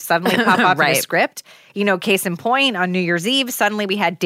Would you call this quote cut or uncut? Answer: uncut